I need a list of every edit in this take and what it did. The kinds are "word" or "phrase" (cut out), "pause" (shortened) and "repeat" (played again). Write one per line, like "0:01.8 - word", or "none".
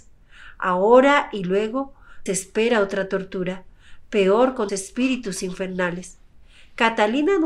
0:02.3 - word
0:04.7 - word